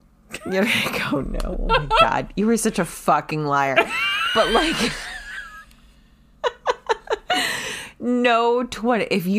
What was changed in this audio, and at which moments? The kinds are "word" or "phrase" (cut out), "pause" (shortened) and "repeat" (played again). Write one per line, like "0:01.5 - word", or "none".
none